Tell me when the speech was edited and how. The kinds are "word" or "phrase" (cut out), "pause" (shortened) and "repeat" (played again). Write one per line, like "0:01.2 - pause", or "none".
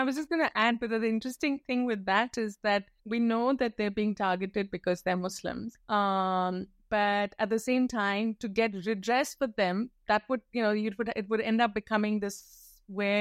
0:03.0 - pause
0:05.8 - pause

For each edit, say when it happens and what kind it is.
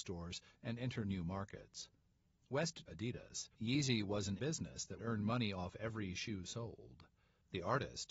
0:02.9 - phrase
0:03.5 - pause
0:04.4 - word
0:05.0 - word

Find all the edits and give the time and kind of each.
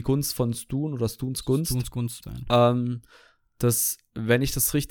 0:02.2 - phrase

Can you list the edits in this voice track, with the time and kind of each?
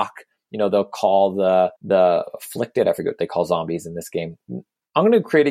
0:01.8 - pause

